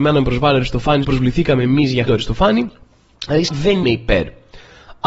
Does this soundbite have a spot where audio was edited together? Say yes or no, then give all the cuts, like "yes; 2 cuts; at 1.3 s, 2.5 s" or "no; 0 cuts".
yes; 4 cuts; at 1.0 s, 2.1 s, 3.5 s, 3.8 s